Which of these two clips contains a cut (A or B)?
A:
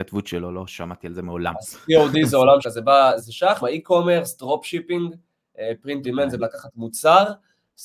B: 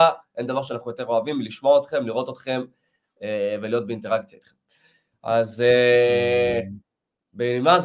A